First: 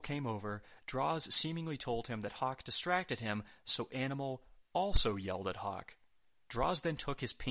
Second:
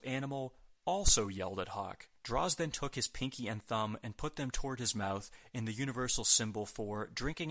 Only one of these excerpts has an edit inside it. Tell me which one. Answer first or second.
second